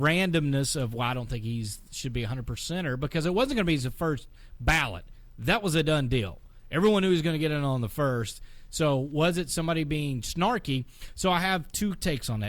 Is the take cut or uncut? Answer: uncut